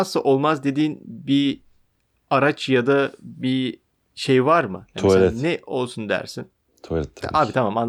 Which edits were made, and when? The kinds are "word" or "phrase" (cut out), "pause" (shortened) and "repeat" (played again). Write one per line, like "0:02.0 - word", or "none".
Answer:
none